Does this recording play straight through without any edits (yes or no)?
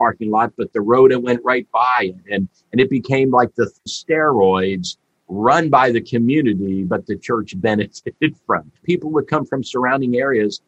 no